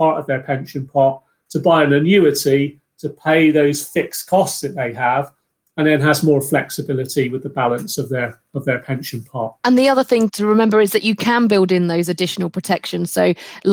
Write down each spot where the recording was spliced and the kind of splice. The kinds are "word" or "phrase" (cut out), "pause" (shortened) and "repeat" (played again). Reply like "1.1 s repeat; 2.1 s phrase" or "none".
none